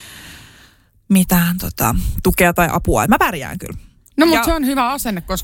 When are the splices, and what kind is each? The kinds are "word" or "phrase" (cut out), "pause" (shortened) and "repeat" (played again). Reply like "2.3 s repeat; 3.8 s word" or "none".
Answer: none